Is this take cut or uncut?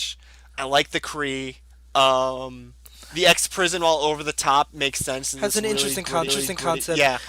cut